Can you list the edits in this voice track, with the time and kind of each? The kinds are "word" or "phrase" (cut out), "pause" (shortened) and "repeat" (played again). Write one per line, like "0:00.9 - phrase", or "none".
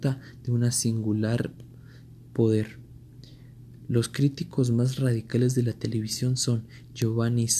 none